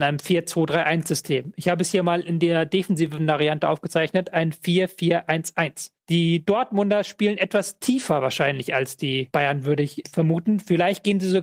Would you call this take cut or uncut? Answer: cut